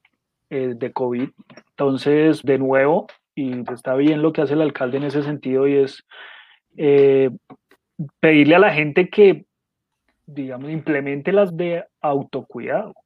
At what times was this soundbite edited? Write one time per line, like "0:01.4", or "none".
0:02.4
0:03.7
0:11.5